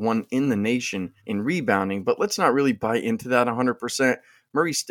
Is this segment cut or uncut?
cut